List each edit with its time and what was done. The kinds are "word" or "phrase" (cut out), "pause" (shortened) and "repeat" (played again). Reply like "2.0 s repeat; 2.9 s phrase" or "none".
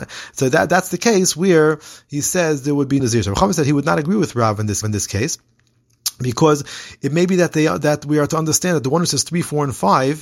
3.0 s word; 4.8 s repeat